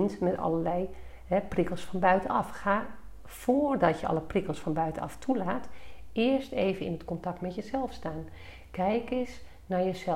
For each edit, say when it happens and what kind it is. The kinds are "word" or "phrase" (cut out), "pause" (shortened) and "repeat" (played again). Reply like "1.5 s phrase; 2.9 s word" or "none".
none